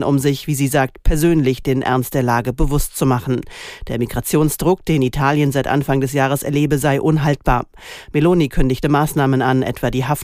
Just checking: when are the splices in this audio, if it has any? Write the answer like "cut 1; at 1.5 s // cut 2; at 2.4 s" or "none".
none